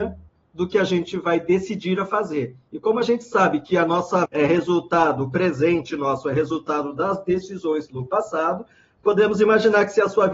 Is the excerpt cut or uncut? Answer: cut